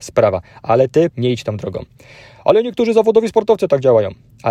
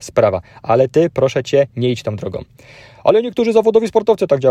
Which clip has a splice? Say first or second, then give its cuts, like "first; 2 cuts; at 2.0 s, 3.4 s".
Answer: first; 1 cut; at 1.1 s